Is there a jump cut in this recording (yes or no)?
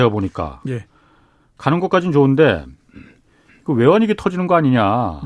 no